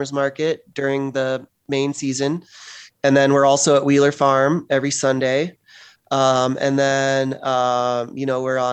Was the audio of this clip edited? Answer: no; 0 cuts

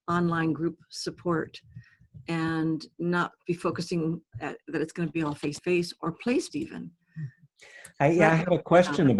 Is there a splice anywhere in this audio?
yes; 3 cuts; at 4.3 s, 5.6 s, 6.5 s

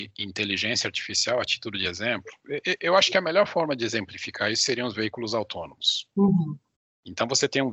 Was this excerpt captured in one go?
yes; 0 cuts

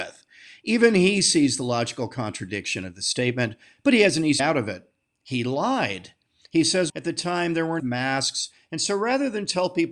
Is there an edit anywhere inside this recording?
yes; 3 cuts; at 4.4 s, 6.9 s, 7.8 s

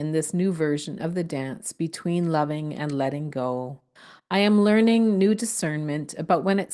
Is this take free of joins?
yes; 0 cuts

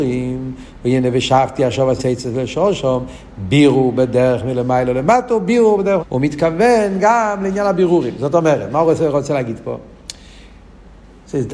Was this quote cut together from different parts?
yes; 2 cuts; at 2.0 s, 6.0 s

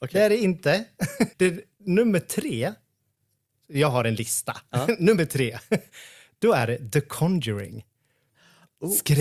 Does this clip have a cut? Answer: yes; 1 cut; at 1.3 s

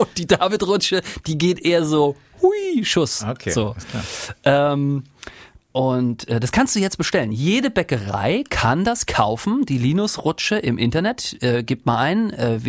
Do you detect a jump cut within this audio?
no; 0 cuts

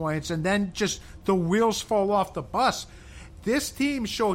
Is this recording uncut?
yes; 0 cuts

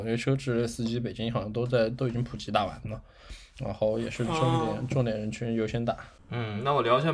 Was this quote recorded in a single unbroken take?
yes; 0 cuts

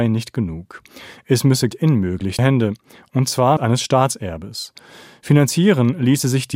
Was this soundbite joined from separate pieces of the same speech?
yes; 3 cuts; at 1.7 s, 2.4 s, 3.6 s

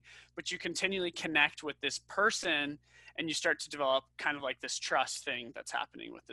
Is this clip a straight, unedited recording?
yes; 0 cuts

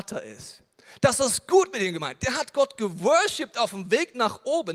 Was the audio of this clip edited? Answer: no; 0 cuts

